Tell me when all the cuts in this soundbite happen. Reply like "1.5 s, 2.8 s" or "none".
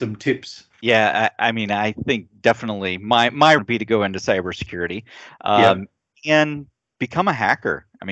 3.6 s